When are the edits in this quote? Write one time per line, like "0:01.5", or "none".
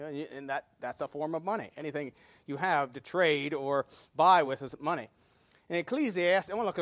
none